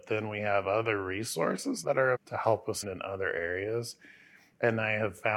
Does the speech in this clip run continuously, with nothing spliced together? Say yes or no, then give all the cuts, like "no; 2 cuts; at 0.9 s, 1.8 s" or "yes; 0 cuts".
no; 3 cuts; at 1.8 s, 2.2 s, 2.8 s